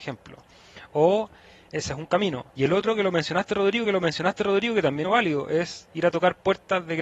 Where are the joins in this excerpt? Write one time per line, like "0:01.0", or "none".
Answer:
0:02.5
0:03.8
0:05.0